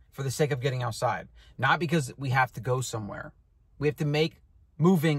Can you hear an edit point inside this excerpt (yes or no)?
no